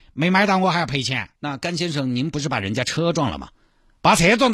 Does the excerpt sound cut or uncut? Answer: cut